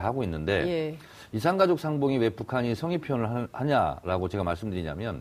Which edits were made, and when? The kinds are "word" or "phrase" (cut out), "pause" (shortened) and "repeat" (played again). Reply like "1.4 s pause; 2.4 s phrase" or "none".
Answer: none